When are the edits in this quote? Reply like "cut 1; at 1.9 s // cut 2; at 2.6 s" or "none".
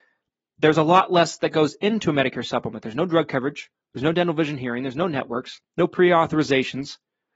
cut 1; at 5.6 s

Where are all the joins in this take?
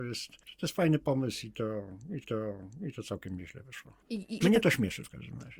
cut 1; at 2.2 s // cut 2; at 4.0 s // cut 3; at 4.4 s

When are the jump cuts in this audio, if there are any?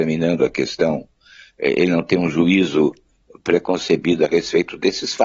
none

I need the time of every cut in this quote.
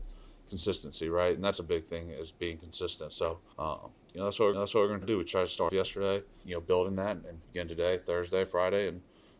cut 1; at 3.5 s // cut 2; at 4.5 s // cut 3; at 5.0 s // cut 4; at 5.7 s // cut 5; at 6.4 s // cut 6; at 7.4 s

